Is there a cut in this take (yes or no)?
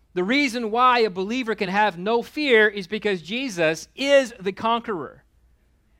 no